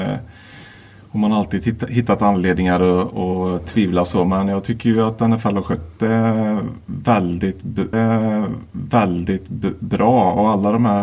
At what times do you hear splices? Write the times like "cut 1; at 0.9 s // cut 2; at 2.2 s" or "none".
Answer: cut 1; at 7.9 s